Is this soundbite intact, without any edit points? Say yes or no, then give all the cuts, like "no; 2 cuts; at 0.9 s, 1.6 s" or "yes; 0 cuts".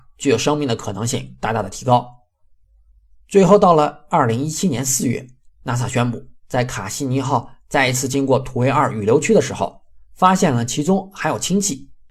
yes; 0 cuts